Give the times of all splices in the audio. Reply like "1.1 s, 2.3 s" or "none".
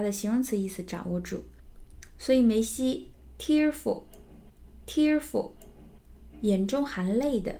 4.8 s